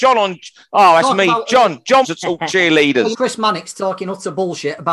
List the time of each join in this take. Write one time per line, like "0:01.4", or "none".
0:02.0
0:03.1